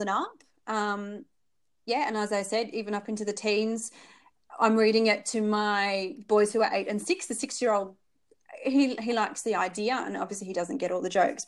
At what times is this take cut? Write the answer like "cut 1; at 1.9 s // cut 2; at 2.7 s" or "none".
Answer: none